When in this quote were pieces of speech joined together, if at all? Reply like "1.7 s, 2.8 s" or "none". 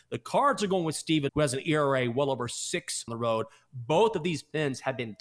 1.3 s, 3.1 s